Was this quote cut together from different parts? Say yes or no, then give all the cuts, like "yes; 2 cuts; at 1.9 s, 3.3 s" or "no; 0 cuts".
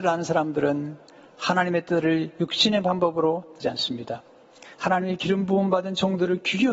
yes; 1 cut; at 3.6 s